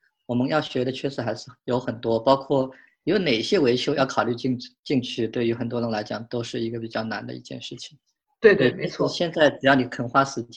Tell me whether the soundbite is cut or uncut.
uncut